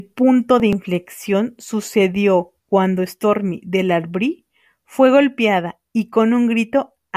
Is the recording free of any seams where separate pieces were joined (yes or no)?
no